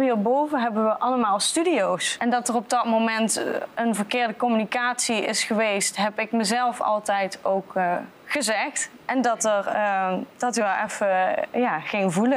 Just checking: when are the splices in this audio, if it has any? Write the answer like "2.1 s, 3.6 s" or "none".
none